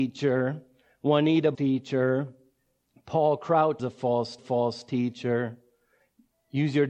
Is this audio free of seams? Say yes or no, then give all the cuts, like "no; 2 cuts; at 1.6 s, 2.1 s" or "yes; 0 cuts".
no; 3 cuts; at 1.5 s, 3.8 s, 4.4 s